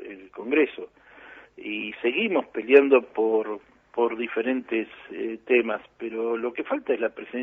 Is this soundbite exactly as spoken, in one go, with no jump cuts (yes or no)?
yes